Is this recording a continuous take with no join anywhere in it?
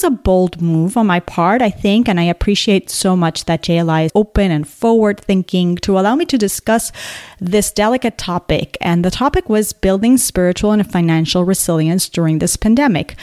no; 1 cut; at 4.1 s

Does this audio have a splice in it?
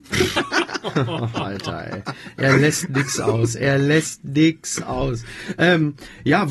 no; 0 cuts

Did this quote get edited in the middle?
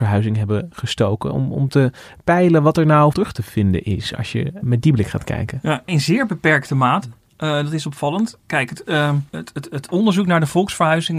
yes; 4 cuts; at 3.1 s, 4.6 s, 5.9 s, 9.3 s

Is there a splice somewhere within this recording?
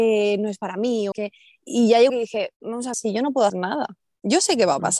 yes; 5 cuts; at 1.1 s, 2.1 s, 2.5 s, 2.9 s, 3.5 s

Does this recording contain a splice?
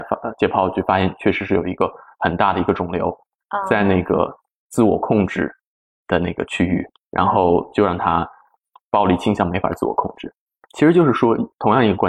no; 0 cuts

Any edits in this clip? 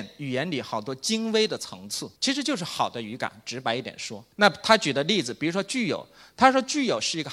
yes; 2 cuts; at 2.2 s, 4.3 s

